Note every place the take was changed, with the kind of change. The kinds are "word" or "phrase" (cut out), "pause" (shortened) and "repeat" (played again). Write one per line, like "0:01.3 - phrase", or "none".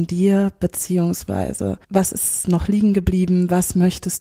0:01.8 - pause